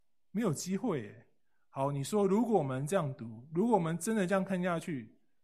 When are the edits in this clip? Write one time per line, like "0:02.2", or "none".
none